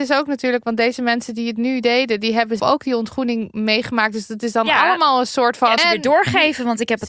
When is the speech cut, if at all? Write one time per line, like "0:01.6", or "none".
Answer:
0:02.6
0:05.8